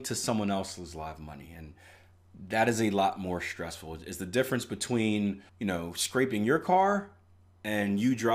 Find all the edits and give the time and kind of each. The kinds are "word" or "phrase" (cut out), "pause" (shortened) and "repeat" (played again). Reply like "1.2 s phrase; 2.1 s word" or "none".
5.5 s pause